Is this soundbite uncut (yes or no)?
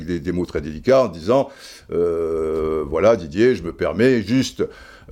yes